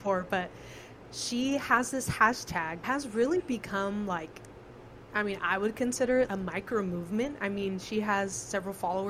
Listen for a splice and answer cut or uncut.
cut